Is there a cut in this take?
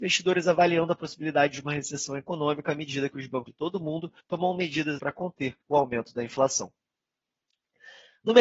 yes; 4 cuts; at 3.5 s, 4.2 s, 5.0 s, 5.6 s

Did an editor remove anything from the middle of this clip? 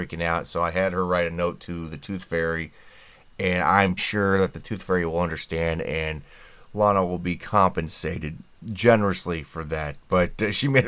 yes; 1 cut; at 4.0 s

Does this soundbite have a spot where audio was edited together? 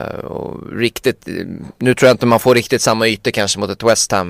no; 0 cuts

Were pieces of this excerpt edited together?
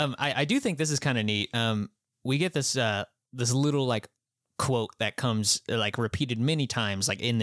no; 0 cuts

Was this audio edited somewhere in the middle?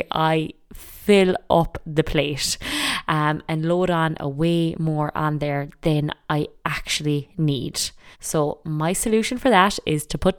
yes; 1 cut; at 8.1 s

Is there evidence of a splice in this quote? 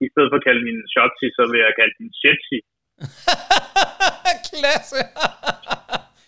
no; 0 cuts

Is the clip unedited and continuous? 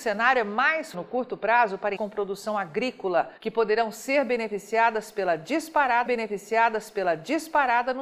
no; 4 cuts; at 0.9 s, 2.0 s, 3.4 s, 6.1 s

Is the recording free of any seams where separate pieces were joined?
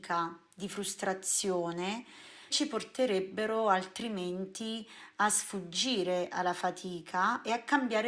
no; 1 cut; at 2.5 s

